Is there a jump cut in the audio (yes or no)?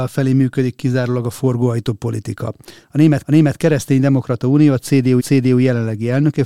yes